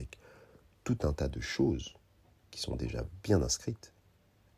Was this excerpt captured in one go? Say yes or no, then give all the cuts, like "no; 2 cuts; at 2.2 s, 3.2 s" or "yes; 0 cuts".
yes; 0 cuts